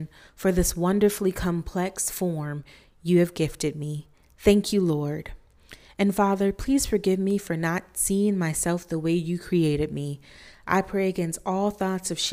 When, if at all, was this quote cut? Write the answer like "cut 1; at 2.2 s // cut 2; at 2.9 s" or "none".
none